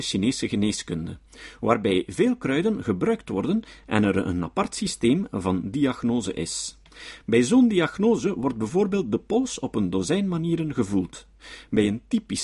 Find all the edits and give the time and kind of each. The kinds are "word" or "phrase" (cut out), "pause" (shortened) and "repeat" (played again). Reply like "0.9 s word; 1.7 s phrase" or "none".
none

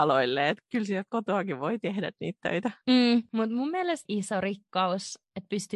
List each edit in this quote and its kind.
4.1 s phrase

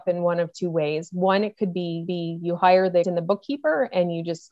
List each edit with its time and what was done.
2.1 s repeat; 3.0 s word

